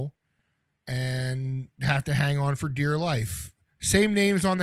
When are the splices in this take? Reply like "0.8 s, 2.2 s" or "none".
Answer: 1.7 s